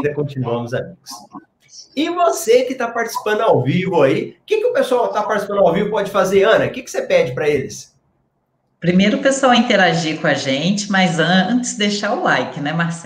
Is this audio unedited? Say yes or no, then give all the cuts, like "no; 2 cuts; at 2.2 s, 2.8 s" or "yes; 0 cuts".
yes; 0 cuts